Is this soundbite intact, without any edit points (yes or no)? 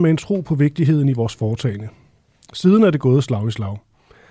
yes